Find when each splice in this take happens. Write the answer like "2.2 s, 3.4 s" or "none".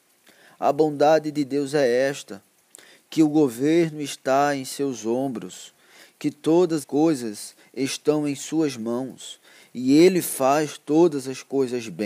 6.8 s

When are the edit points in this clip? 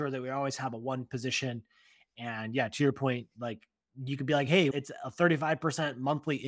none

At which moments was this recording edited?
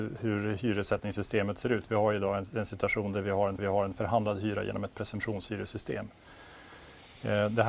3.6 s

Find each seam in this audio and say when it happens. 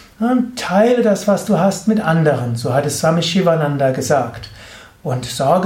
none

